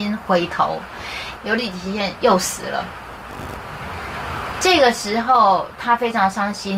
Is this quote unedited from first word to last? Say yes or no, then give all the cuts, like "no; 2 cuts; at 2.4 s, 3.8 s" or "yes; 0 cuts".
no; 1 cut; at 1.4 s